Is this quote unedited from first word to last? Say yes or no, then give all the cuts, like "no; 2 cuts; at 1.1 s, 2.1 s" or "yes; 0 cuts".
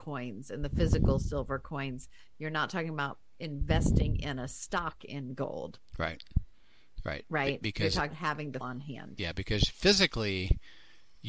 no; 2 cuts; at 8.1 s, 8.6 s